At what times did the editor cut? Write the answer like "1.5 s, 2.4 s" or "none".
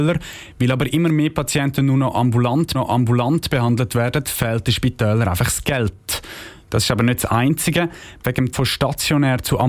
2.7 s, 8.5 s

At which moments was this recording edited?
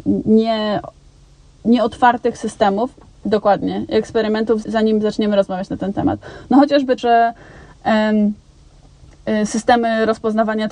4.6 s, 7.0 s

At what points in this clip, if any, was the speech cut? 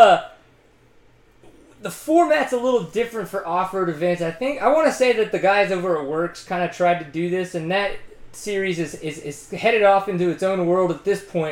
none

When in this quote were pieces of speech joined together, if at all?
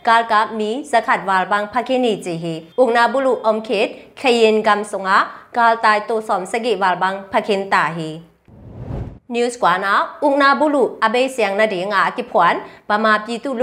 2.7 s, 9.2 s

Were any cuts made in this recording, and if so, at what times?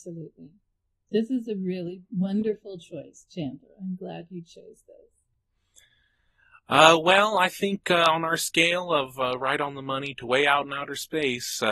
none

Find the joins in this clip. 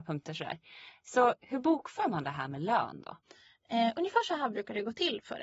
none

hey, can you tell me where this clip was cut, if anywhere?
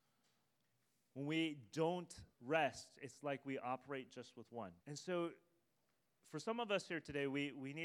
2.3 s, 4.8 s

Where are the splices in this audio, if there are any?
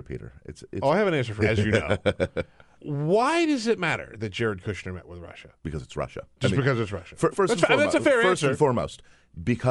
1.4 s, 2.7 s, 5.6 s, 6.3 s, 7.3 s

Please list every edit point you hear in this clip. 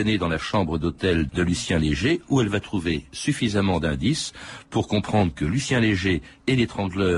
1.3 s

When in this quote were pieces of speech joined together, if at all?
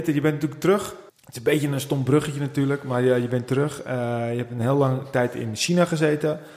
1.1 s

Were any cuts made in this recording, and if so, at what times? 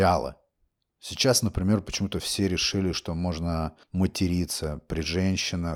3.8 s

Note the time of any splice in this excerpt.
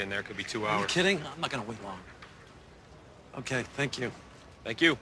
1.8 s

